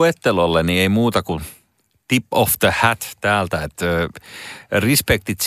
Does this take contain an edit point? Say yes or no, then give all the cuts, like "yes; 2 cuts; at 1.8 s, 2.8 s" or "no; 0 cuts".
no; 0 cuts